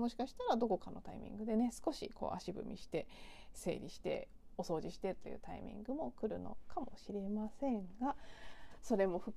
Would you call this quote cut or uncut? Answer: cut